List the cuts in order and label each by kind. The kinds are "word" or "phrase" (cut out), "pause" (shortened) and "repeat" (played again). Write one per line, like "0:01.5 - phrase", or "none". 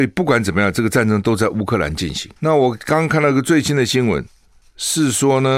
0:02.4 - pause